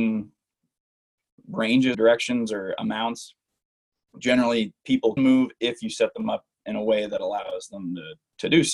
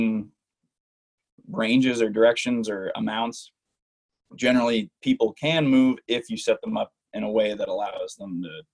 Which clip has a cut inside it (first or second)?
first